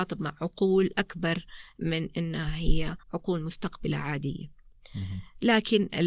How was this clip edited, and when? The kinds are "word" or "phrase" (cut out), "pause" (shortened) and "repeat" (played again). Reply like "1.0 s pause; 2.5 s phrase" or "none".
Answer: 3.0 s pause